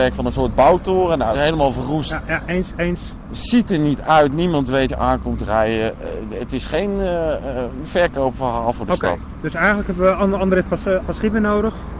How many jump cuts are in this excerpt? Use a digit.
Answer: 3